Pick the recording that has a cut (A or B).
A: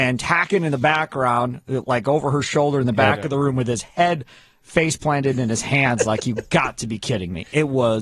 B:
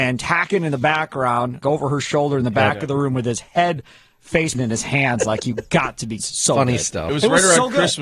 B